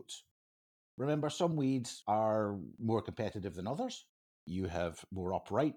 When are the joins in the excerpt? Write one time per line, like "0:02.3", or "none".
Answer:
none